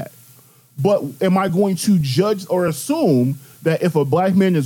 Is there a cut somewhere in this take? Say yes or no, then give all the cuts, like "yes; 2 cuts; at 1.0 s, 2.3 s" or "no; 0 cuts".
no; 0 cuts